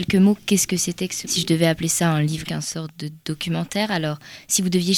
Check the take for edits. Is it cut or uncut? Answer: cut